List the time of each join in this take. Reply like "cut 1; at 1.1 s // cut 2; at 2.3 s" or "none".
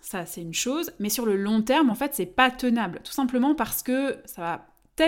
none